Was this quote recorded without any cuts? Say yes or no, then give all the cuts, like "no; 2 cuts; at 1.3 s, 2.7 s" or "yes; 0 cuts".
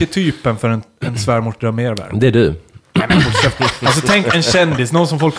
yes; 0 cuts